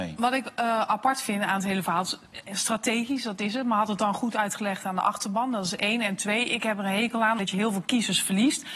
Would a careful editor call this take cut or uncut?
cut